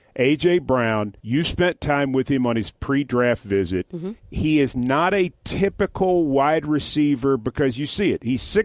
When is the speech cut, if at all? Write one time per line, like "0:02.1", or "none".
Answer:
0:01.2
0:04.2